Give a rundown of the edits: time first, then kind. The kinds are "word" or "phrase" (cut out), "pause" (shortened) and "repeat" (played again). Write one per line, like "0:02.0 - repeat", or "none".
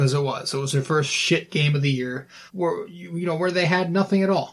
0:02.5 - pause